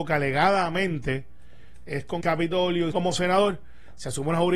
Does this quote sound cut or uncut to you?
cut